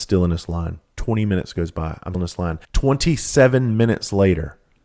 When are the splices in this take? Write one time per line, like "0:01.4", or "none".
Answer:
0:02.1
0:02.6